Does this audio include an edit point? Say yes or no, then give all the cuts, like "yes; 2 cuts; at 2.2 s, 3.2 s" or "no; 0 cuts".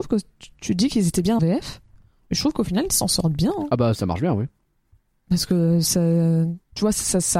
yes; 2 cuts; at 1.4 s, 4.0 s